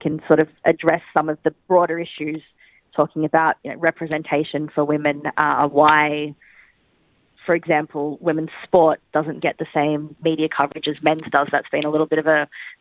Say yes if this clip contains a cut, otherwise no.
no